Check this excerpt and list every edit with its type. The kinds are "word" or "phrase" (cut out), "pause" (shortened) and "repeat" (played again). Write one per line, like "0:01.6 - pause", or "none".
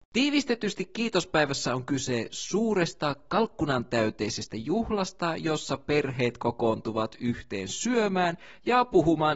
none